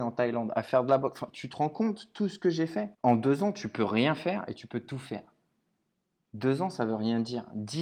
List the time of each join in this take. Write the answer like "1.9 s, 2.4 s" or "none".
2.9 s